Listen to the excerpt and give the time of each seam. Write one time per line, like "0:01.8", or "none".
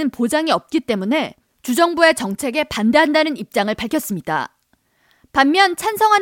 none

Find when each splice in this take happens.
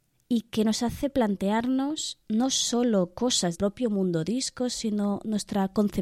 0:03.5

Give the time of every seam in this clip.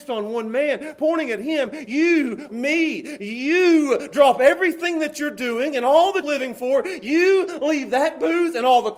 0:02.5
0:06.2

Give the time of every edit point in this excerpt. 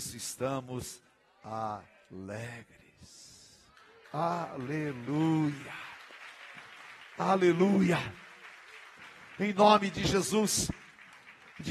none

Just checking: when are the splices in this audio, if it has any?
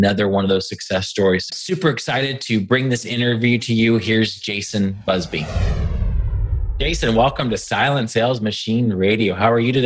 0:01.5

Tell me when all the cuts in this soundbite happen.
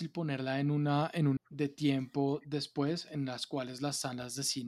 0:01.4

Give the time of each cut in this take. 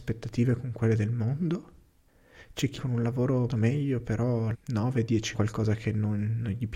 0:02.8
0:03.5
0:04.5
0:05.3

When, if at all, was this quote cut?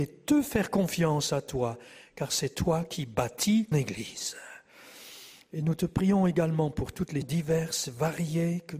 0:03.7
0:07.2

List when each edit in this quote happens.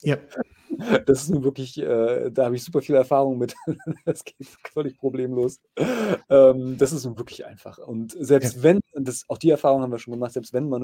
none

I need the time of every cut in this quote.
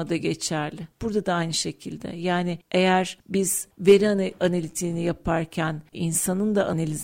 none

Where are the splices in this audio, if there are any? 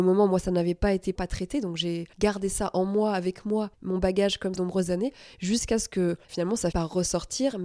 0:01.1
0:02.1
0:03.7
0:04.5
0:06.2
0:06.7

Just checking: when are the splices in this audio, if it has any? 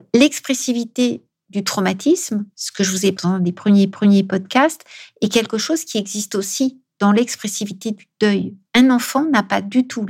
0:02.5
0:03.1
0:03.9
0:08.6

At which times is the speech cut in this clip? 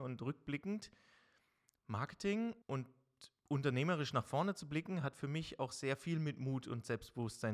0:02.6

